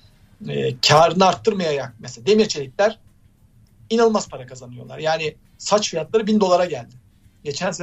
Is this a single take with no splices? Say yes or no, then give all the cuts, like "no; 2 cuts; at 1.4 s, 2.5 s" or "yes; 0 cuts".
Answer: yes; 0 cuts